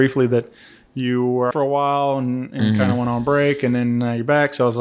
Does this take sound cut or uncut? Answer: cut